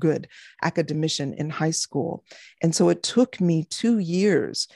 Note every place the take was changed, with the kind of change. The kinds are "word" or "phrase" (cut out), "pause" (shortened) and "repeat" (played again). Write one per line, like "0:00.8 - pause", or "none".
none